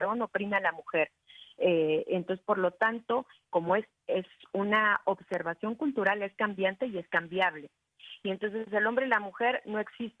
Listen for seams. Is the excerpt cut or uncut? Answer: uncut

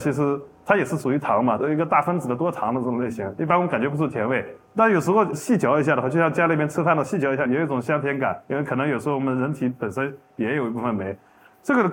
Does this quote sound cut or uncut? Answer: cut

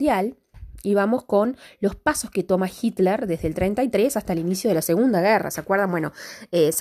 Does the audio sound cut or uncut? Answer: uncut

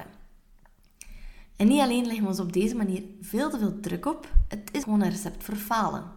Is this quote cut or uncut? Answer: cut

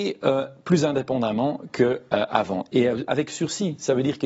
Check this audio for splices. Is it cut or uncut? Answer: cut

